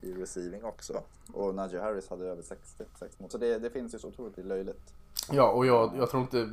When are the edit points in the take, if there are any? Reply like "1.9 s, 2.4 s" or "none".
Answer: 3.3 s, 4.3 s